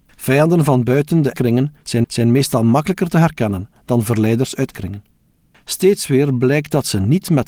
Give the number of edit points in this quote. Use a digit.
3